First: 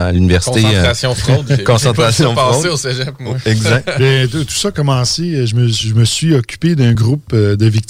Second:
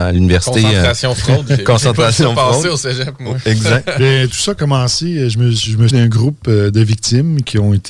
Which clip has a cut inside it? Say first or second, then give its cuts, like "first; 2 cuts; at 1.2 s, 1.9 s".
second; 2 cuts; at 4.3 s, 5.9 s